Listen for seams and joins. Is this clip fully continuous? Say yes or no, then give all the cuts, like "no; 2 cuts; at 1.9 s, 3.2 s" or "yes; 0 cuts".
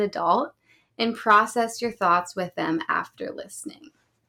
yes; 0 cuts